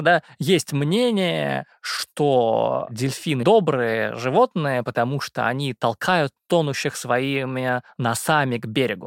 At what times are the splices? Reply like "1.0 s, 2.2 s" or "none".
3.4 s